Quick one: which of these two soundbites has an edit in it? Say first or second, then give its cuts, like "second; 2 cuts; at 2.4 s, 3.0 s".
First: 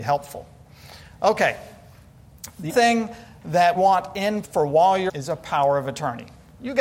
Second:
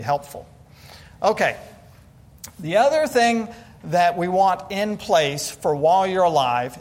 first; 4 cuts; at 2.7 s, 3.8 s, 4.4 s, 5.1 s